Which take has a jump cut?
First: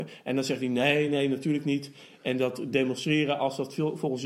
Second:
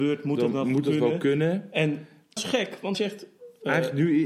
second; 2 cuts; at 2.4 s, 2.9 s

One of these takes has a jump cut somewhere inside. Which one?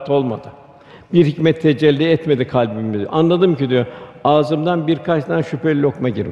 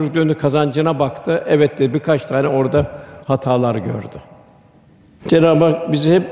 second; 1 cut; at 3.2 s

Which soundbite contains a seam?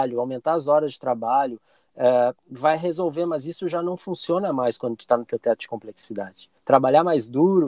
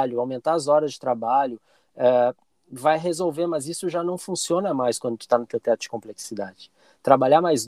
first; 2 cuts; at 2.4 s, 6.6 s

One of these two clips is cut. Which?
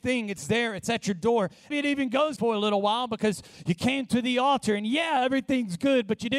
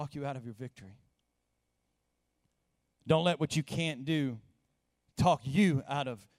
first; 2 cuts; at 1.7 s, 2.4 s

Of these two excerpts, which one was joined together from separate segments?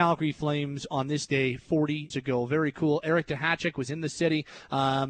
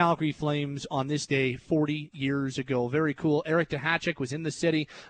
first; 1 cut; at 2.1 s

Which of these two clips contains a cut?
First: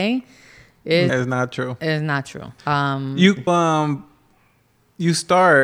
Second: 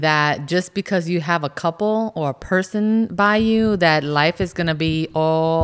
first; 3 cuts; at 1.1 s, 2.6 s, 3.5 s

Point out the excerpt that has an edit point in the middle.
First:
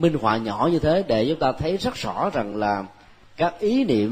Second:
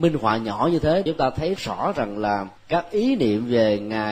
second; 3 cuts; at 1.1 s, 1.6 s, 2.6 s

